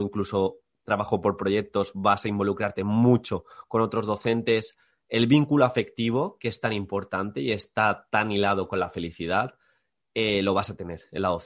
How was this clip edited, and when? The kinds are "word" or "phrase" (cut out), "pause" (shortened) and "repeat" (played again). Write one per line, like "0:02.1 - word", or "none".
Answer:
none